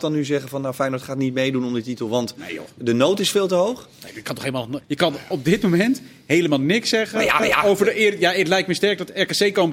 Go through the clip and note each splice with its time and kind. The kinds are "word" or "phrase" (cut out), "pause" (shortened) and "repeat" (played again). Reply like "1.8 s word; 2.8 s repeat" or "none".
4.8 s pause; 7.4 s repeat